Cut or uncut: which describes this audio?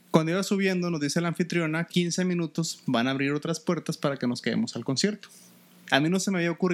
cut